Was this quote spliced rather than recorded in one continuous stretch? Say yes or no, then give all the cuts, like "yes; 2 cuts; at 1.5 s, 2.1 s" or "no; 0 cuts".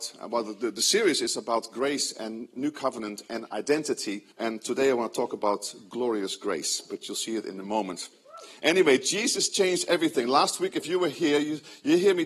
yes; 1 cut; at 4.3 s